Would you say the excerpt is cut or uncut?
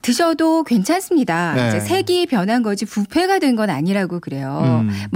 uncut